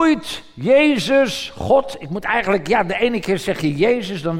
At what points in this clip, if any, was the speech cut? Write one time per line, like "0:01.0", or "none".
none